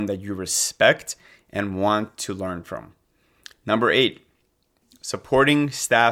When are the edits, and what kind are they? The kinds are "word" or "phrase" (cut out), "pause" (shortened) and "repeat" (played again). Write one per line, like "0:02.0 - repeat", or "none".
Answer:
none